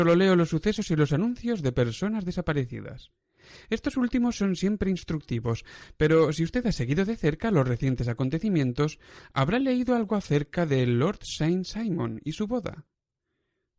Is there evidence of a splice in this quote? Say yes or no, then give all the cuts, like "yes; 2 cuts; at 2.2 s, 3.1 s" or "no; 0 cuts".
no; 0 cuts